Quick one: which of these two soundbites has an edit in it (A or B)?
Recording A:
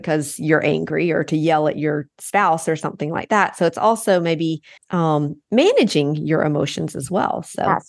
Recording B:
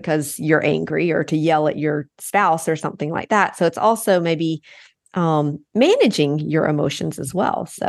A